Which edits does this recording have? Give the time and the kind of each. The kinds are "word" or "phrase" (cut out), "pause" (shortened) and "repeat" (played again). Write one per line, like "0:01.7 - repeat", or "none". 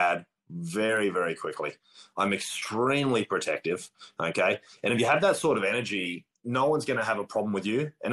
none